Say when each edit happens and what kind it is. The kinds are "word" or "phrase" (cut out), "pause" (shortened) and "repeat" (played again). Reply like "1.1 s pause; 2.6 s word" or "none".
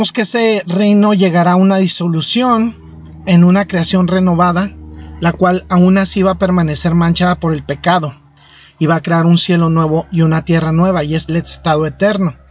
11.3 s word